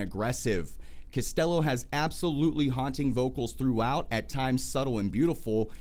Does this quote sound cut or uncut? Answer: uncut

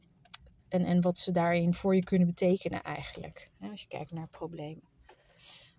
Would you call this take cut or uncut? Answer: uncut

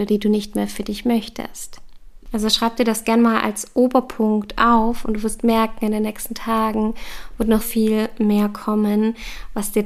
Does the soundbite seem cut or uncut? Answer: cut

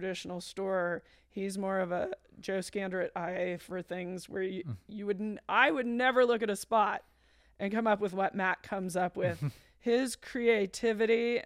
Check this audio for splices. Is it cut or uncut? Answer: uncut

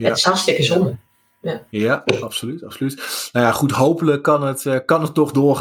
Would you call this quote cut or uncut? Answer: uncut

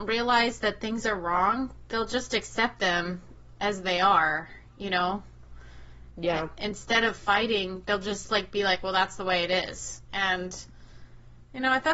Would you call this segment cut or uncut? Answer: uncut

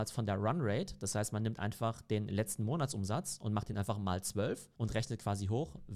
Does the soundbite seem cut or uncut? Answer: uncut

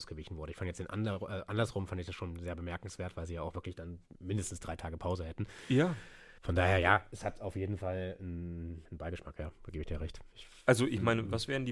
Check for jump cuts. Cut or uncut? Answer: cut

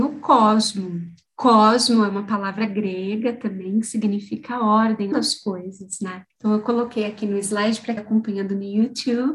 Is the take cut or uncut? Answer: cut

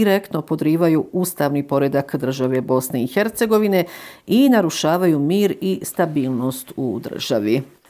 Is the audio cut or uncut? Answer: uncut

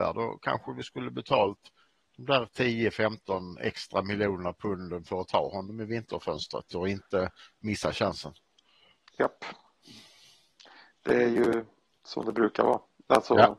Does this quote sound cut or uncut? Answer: uncut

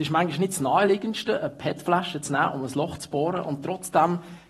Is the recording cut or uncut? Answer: uncut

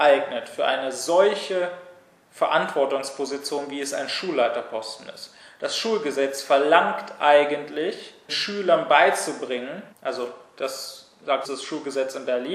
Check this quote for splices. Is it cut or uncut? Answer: cut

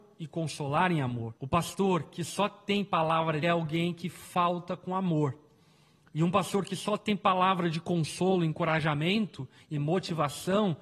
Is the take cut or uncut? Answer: cut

